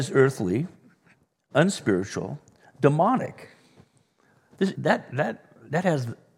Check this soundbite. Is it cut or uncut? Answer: cut